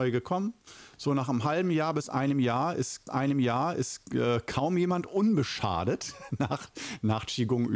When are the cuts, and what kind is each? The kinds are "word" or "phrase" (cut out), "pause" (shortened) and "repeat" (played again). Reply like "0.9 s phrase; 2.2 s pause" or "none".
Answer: 3.1 s repeat